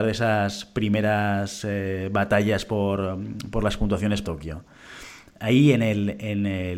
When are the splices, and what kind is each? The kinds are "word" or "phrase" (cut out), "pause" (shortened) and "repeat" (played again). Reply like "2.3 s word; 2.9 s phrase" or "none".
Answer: 4.2 s phrase

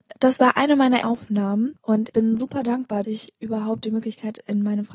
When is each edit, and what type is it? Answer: 1.0 s word; 2.1 s word; 3.0 s word

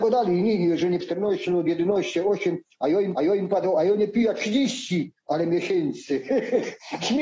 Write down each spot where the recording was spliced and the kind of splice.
1.0 s word; 3.1 s repeat

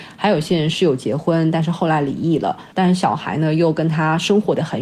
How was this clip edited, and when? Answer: 2.7 s pause

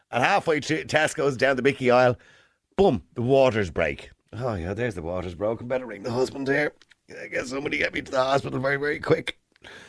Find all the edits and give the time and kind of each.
none

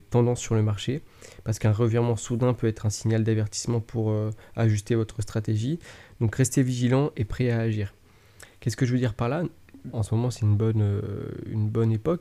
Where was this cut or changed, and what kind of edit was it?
9.9 s word

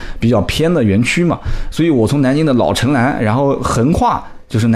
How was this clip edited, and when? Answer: 1.7 s phrase

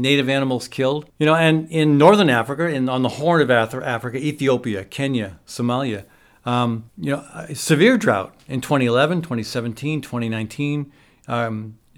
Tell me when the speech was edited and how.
1.1 s pause; 6.9 s pause

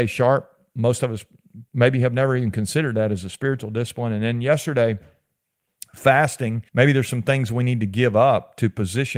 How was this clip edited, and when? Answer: 1.7 s pause; 6.7 s pause

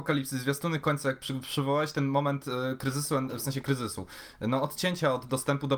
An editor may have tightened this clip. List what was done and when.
none

